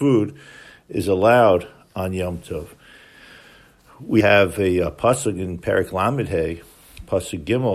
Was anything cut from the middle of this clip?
yes; 1 cut; at 4.2 s

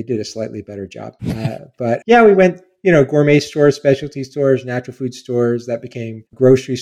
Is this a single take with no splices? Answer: no; 2 cuts; at 1.2 s, 2.0 s

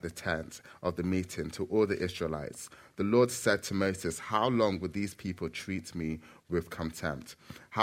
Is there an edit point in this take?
no; 0 cuts

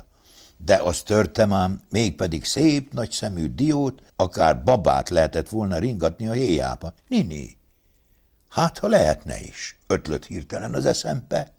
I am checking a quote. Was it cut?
yes; 2 cuts; at 4.1 s, 7.0 s

